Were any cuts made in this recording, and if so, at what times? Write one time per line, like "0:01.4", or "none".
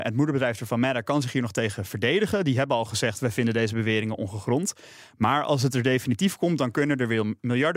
none